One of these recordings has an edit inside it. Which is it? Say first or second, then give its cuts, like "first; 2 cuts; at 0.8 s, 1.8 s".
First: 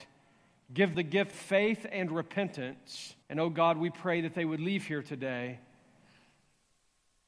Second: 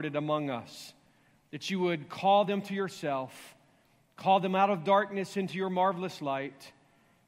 first; 3 cuts; at 0.9 s, 1.3 s, 3.2 s